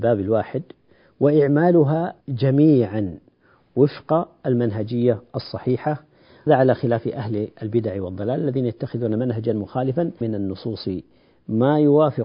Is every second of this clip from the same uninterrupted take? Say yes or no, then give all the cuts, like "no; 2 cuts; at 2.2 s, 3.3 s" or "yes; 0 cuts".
no; 3 cuts; at 2.2 s, 6.5 s, 10.2 s